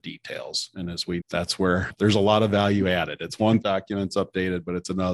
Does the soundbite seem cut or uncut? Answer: cut